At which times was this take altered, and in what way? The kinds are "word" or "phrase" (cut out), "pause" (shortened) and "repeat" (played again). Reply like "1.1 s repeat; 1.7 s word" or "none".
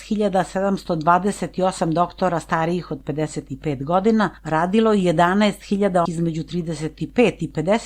4.4 s pause; 6.1 s word